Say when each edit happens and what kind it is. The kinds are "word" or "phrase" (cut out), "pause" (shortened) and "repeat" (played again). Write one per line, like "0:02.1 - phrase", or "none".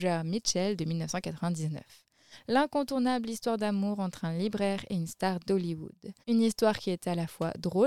0:06.2 - pause